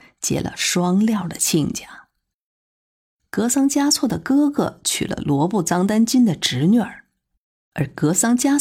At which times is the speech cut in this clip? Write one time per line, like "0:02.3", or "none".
none